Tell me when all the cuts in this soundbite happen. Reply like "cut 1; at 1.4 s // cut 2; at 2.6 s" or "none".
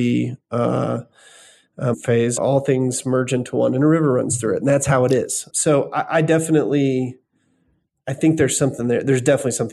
cut 1; at 1.9 s // cut 2; at 2.4 s // cut 3; at 5.5 s